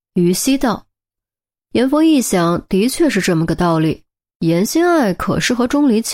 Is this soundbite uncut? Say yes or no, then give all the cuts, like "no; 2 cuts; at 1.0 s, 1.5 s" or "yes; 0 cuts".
yes; 0 cuts